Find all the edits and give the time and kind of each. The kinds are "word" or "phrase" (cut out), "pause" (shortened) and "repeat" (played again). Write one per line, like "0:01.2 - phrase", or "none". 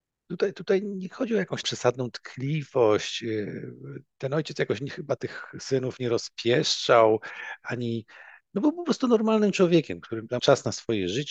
0:01.6 - word
0:10.4 - word